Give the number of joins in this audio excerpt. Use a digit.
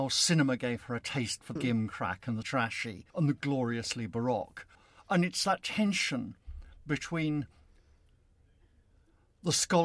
4